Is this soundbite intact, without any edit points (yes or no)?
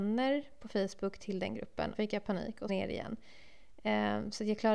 no